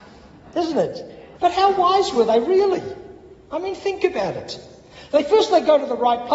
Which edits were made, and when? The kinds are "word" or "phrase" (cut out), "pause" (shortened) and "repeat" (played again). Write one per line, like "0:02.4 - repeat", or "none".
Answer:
0:01.3 - pause